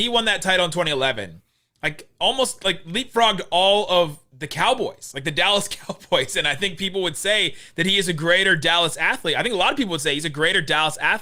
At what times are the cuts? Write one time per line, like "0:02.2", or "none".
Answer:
none